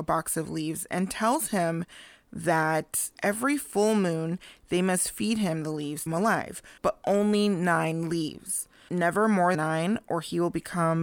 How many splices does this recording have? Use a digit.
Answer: 4